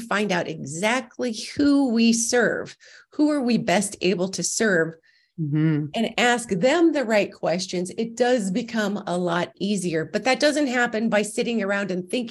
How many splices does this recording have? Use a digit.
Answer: 0